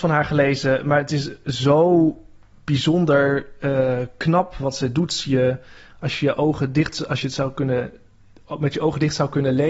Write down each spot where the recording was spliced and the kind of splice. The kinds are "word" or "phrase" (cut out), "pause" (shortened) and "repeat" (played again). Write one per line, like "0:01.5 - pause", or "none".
none